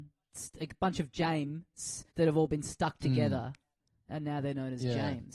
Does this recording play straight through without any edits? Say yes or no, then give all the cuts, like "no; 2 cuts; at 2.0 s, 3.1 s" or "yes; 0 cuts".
no; 1 cut; at 2.1 s